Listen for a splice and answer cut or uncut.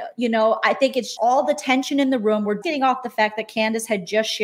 cut